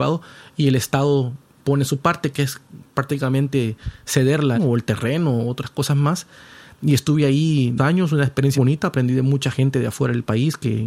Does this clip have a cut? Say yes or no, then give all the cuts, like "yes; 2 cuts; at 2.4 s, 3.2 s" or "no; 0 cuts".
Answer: yes; 3 cuts; at 4.5 s, 7.8 s, 8.5 s